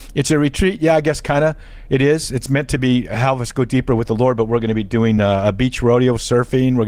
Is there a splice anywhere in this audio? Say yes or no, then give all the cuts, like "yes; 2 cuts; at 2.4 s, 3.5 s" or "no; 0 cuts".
no; 0 cuts